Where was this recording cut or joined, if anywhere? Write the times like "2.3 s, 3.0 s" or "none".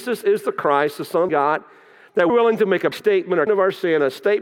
1.3 s, 2.3 s, 2.9 s, 3.5 s